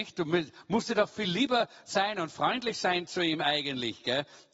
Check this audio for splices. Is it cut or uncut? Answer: uncut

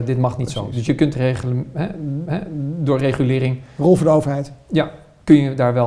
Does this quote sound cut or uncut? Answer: cut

